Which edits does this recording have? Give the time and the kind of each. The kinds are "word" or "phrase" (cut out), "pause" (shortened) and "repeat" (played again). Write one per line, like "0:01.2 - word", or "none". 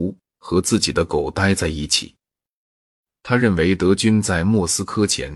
none

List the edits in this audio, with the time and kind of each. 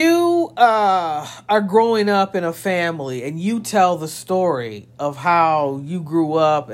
none

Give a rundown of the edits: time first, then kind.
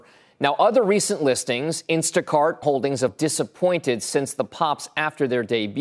0:02.6 - word
0:03.1 - word

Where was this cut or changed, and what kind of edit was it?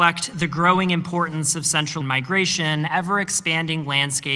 0:02.0 - word
0:02.9 - phrase

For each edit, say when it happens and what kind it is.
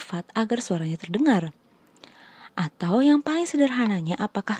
none

